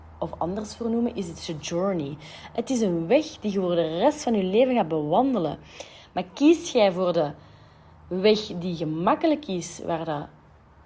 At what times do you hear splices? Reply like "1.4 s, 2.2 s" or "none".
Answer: none